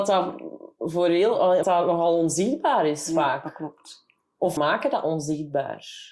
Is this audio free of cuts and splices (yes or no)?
no